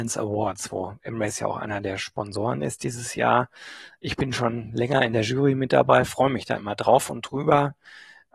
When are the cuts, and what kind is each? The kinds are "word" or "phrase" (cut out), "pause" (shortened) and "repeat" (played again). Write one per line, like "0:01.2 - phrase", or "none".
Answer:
none